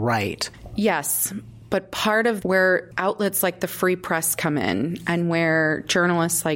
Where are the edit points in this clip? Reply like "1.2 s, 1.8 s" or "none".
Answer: 2.4 s